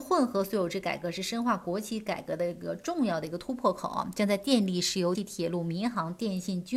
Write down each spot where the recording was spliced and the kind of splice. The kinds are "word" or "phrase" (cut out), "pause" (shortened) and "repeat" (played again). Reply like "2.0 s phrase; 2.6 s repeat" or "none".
5.1 s phrase